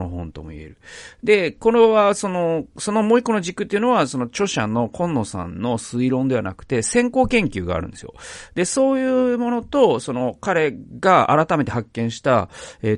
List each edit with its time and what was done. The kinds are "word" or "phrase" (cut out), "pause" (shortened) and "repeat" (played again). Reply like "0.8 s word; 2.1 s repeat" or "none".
none